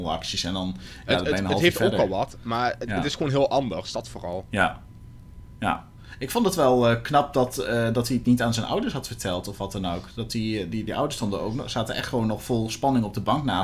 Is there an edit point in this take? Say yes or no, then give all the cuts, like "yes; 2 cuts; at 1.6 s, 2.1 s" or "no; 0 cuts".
no; 0 cuts